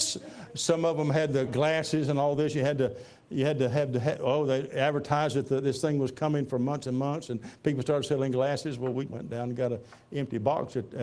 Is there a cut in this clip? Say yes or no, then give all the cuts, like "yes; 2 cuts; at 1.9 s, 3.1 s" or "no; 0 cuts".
yes; 2 cuts; at 1.5 s, 9.1 s